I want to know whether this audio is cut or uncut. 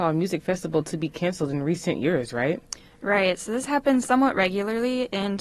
uncut